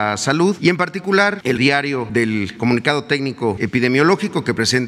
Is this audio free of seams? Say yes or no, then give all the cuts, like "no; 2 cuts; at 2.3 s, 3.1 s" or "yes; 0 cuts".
no; 2 cuts; at 1.6 s, 3.6 s